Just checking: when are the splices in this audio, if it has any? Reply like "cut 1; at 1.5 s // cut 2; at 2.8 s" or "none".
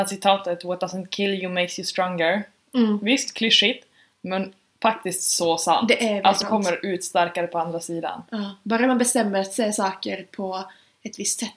cut 1; at 6.4 s